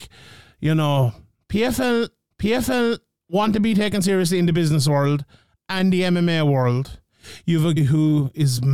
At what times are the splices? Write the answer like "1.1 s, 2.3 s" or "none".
2.3 s, 7.8 s